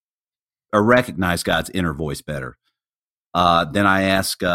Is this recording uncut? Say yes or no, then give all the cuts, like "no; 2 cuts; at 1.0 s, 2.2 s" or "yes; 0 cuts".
yes; 0 cuts